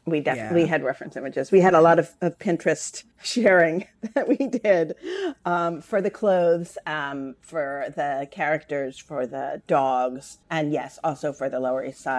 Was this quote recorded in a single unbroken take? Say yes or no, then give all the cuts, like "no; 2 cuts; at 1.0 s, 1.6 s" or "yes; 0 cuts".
no; 2 cuts; at 3.1 s, 10.4 s